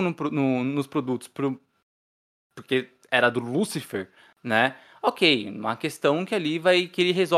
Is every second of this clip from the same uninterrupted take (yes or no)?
yes